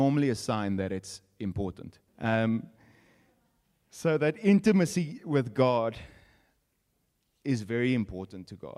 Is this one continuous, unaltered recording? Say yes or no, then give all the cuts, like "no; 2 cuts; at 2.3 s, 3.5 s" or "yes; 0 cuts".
no; 1 cut; at 2.1 s